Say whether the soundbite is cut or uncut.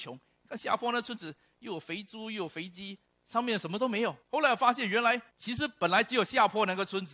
cut